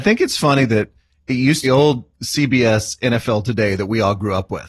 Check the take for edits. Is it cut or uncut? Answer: cut